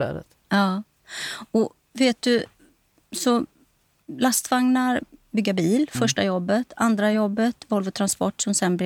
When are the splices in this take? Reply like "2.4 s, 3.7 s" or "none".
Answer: none